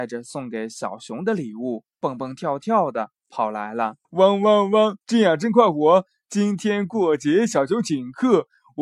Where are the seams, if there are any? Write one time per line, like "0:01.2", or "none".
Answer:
0:04.0
0:05.0